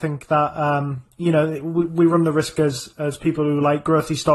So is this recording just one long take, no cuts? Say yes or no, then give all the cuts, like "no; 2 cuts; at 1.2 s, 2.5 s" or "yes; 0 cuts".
yes; 0 cuts